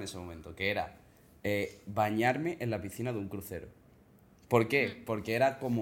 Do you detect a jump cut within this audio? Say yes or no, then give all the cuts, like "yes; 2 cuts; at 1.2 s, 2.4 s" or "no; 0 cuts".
no; 0 cuts